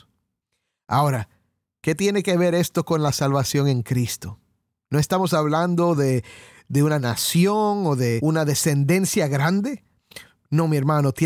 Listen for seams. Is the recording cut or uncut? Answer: uncut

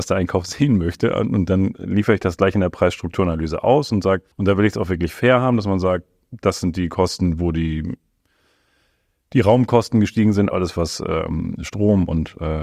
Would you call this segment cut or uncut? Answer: cut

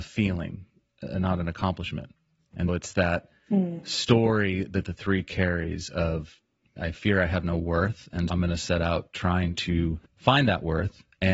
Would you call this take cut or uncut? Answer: cut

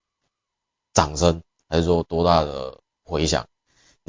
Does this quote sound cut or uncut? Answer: uncut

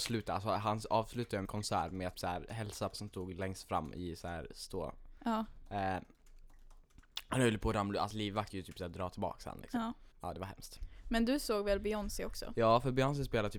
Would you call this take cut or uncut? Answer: cut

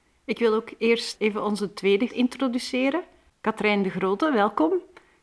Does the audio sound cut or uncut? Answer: cut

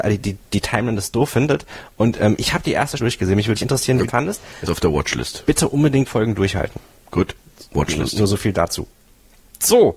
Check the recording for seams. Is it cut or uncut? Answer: cut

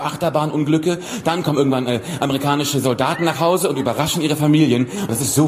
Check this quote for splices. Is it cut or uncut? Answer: uncut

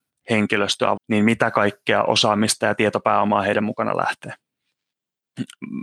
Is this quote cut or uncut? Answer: cut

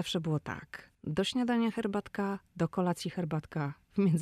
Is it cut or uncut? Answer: cut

